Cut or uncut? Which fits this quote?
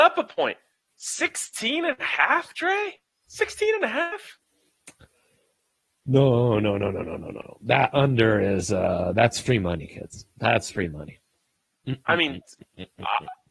uncut